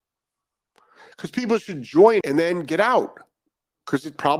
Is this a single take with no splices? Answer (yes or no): no